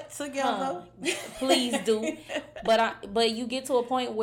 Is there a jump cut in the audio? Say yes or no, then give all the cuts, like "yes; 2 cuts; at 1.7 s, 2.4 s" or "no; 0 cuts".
no; 0 cuts